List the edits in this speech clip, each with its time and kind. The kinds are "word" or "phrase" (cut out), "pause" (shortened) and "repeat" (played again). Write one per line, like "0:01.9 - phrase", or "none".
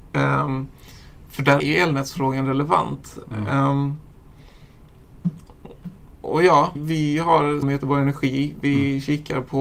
0:01.6 - word
0:06.8 - word
0:07.6 - word